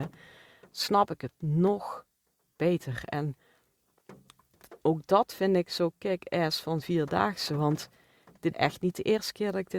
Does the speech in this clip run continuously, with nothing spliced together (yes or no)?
no